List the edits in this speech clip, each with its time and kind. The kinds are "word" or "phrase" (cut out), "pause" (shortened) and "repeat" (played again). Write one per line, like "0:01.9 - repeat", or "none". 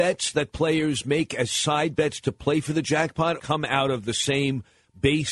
0:03.4 - phrase